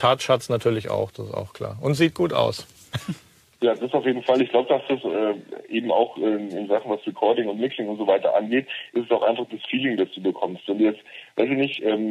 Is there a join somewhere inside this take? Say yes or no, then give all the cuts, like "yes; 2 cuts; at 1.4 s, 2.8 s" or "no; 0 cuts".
no; 0 cuts